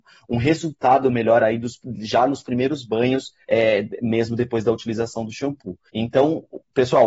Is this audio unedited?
no; 2 cuts; at 3.4 s, 5.9 s

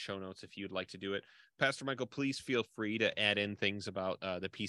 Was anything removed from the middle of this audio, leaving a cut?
no; 0 cuts

